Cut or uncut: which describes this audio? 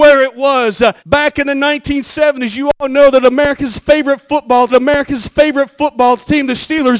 cut